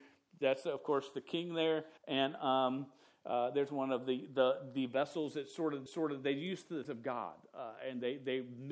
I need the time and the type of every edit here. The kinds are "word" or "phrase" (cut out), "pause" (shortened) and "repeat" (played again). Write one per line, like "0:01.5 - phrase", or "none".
0:02.0 - pause
0:05.9 - repeat
0:06.8 - word